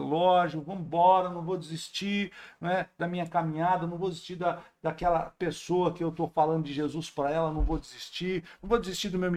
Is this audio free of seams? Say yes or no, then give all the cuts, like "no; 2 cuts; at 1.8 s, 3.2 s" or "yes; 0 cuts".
yes; 0 cuts